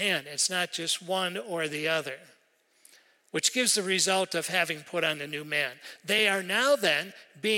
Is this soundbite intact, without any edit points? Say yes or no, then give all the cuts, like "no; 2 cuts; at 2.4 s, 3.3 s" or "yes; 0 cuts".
yes; 0 cuts